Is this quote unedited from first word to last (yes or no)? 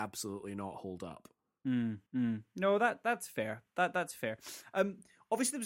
no